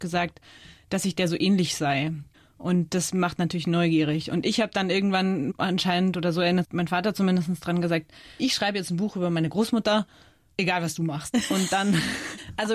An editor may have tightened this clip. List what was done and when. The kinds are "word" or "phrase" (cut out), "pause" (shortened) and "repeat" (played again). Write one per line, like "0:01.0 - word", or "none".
0:06.6 - word
0:08.4 - word